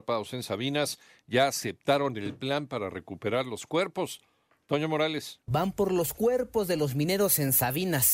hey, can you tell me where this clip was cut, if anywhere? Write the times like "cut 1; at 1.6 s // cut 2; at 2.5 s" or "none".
none